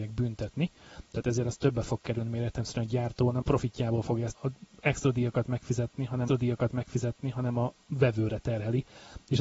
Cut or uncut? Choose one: cut